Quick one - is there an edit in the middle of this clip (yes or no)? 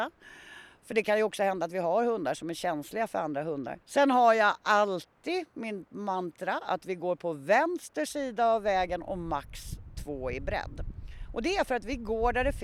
yes